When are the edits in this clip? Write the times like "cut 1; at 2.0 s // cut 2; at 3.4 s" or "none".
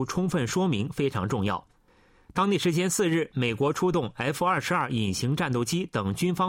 none